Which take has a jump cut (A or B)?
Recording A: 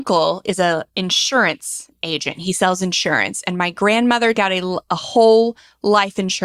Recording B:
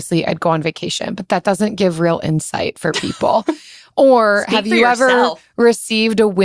A